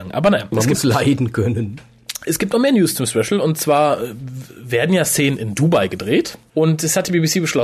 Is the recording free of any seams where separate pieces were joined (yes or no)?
yes